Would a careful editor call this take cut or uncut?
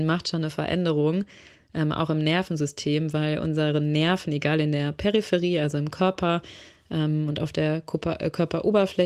uncut